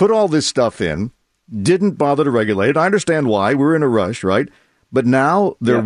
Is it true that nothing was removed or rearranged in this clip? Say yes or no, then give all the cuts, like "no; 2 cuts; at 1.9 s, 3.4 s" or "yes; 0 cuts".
yes; 0 cuts